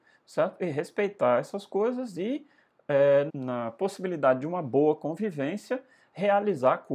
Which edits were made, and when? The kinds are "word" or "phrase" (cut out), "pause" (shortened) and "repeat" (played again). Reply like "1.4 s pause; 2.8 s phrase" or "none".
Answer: 3.3 s phrase